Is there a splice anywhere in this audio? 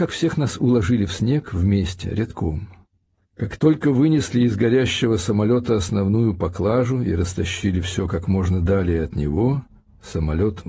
no; 0 cuts

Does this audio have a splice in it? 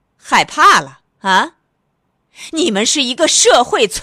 yes; 1 cut; at 1.1 s

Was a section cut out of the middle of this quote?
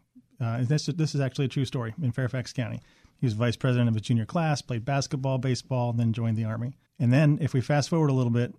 yes; 1 cut; at 6.9 s

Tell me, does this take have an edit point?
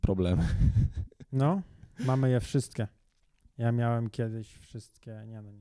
no; 0 cuts

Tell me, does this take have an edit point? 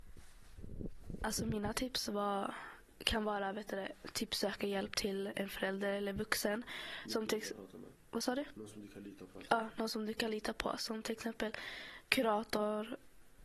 no; 0 cuts

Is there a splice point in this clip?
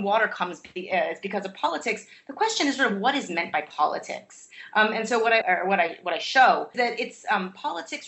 yes; 2 cuts; at 5.4 s, 6.7 s

